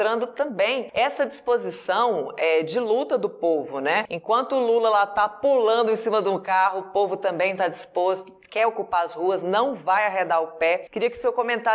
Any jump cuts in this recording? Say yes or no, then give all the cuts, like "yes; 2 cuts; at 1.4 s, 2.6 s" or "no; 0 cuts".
no; 0 cuts